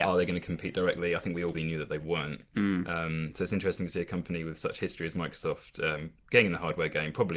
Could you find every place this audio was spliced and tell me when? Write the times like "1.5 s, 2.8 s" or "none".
1.5 s

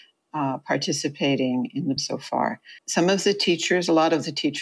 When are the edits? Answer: 2.0 s, 2.8 s

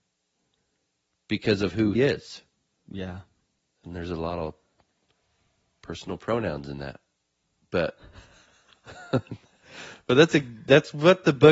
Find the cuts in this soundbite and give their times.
1.9 s

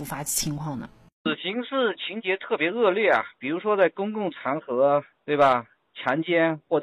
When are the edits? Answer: none

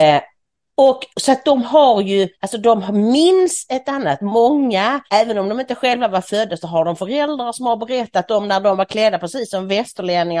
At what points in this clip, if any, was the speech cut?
1.1 s, 2.3 s, 5.1 s

